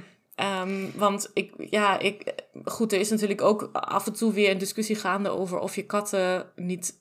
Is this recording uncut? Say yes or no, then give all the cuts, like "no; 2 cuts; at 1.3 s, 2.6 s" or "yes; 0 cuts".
yes; 0 cuts